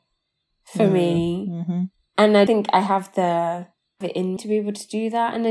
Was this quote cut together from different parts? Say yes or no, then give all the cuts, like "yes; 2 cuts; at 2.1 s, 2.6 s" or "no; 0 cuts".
yes; 3 cuts; at 2.5 s, 4.0 s, 4.4 s